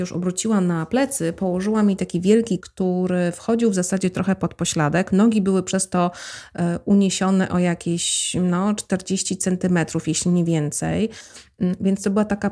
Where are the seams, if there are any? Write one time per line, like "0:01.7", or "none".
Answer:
0:02.6